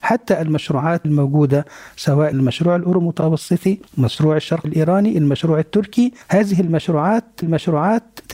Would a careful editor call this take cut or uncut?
cut